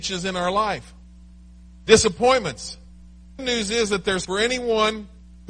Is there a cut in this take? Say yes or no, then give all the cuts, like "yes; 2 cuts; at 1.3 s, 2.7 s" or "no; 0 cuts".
yes; 2 cuts; at 3.4 s, 4.2 s